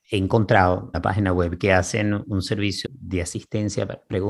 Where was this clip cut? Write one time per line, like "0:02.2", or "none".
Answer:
0:00.9
0:02.8